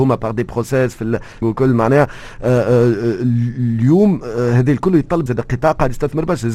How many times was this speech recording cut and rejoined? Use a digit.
2